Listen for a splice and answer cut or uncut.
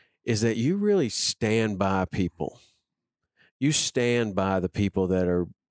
uncut